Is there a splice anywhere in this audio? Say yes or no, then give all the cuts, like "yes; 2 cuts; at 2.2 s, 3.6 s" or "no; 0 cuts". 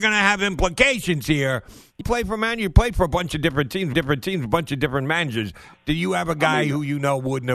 yes; 2 cuts; at 2.0 s, 3.9 s